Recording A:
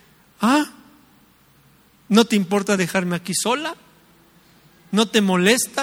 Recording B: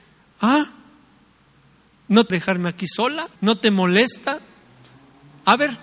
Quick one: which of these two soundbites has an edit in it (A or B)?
B